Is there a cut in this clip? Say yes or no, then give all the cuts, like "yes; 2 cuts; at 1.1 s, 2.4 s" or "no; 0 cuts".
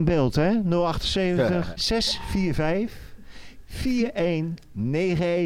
yes; 1 cut; at 1.8 s